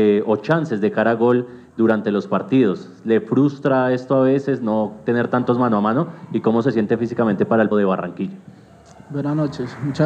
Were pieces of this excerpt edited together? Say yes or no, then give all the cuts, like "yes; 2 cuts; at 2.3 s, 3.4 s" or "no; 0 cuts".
yes; 1 cut; at 7.7 s